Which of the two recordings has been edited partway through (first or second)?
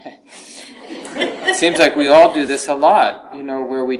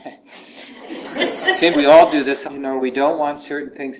second